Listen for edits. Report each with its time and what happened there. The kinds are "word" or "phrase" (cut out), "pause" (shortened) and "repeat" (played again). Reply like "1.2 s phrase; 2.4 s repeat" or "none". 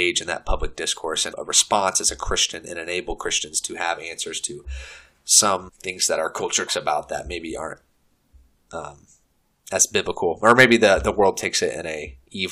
1.3 s word; 5.7 s word; 6.7 s word